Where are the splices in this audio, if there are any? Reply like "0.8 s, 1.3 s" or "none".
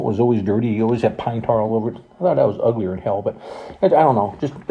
none